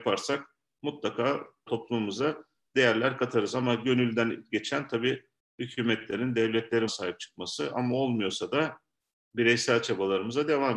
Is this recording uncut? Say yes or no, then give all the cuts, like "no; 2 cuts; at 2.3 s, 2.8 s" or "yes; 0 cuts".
no; 2 cuts; at 1.7 s, 6.9 s